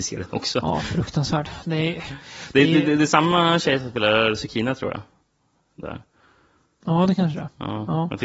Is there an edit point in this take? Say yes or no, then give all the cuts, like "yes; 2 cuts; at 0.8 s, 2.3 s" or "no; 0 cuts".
no; 0 cuts